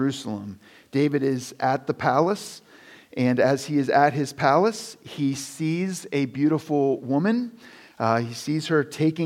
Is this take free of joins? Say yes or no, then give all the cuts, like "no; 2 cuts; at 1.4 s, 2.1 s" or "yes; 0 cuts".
yes; 0 cuts